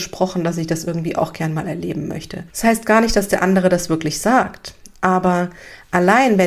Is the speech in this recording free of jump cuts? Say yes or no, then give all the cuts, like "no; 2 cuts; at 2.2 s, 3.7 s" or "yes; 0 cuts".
no; 1 cut; at 2.5 s